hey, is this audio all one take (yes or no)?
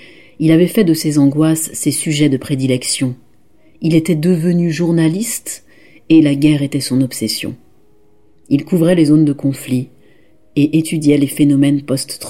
yes